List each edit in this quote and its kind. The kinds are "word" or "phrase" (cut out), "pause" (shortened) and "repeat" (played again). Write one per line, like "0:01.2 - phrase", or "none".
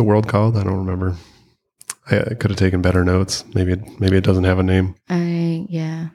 none